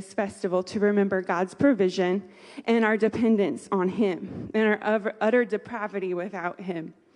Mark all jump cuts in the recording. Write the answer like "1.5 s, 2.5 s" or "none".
none